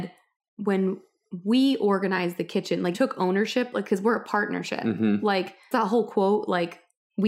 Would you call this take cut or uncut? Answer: cut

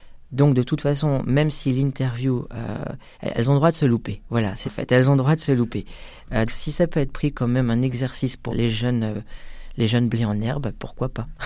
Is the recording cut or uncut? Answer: cut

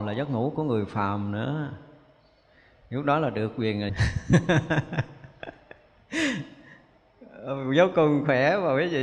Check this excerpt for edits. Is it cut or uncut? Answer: cut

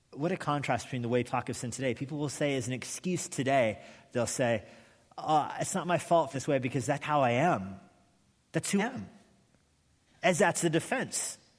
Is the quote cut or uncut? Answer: cut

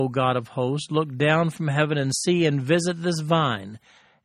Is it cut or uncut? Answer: uncut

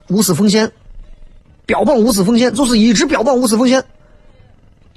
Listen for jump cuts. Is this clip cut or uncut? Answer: cut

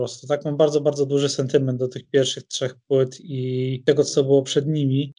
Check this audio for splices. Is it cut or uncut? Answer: uncut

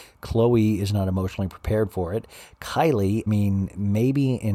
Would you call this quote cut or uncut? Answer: cut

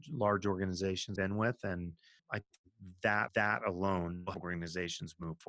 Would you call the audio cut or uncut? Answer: cut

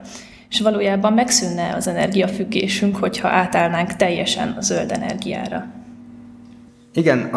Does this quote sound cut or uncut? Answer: uncut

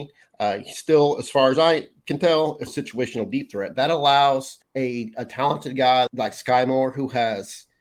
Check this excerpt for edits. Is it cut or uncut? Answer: cut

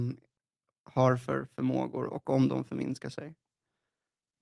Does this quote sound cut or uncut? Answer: uncut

